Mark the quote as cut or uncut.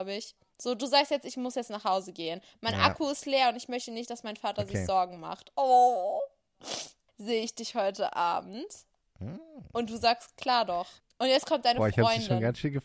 uncut